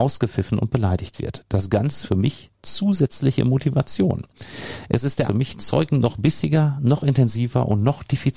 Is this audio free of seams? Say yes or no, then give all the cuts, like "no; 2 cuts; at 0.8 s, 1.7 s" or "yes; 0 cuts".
no; 2 cuts; at 2.0 s, 5.3 s